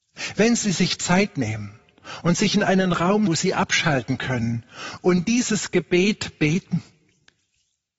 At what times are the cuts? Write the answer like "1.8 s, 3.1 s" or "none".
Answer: 3.3 s